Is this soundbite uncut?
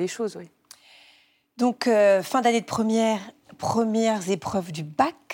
yes; 0 cuts

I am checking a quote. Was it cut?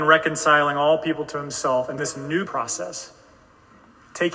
yes; 2 cuts; at 2.0 s, 2.5 s

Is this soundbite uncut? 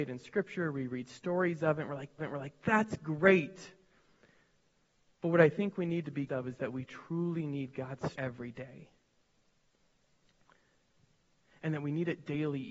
no; 3 cuts; at 2.2 s, 6.3 s, 8.1 s

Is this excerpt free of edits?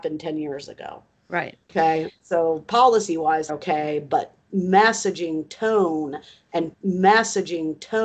no; 3 cuts; at 1.6 s, 3.5 s, 6.7 s

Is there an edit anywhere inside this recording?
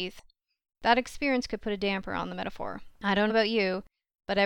yes; 3 cuts; at 1.6 s, 2.9 s, 3.3 s

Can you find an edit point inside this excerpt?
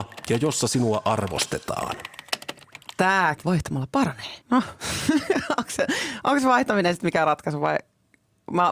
yes; 2 cuts; at 3.4 s, 4.4 s

